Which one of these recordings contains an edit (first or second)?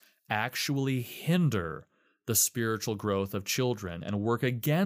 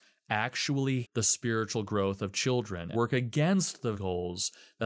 second